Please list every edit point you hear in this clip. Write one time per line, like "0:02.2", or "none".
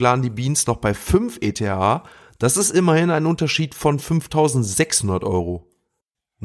none